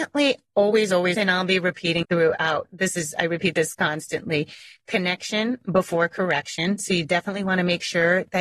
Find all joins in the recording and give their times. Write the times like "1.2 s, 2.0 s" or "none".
1.1 s, 2.0 s